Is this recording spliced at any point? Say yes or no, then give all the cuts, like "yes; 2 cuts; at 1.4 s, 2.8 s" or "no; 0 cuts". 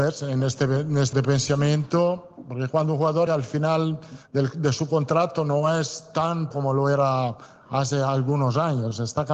yes; 3 cuts; at 1.1 s, 3.3 s, 6.5 s